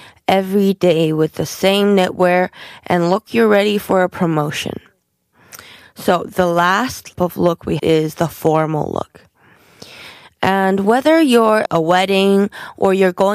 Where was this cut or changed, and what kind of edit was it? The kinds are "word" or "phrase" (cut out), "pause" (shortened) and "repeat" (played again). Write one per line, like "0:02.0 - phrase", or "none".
0:03.3 - word
0:07.1 - word
0:07.8 - word
0:11.7 - word